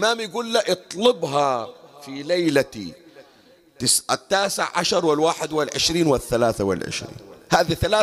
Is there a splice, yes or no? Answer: no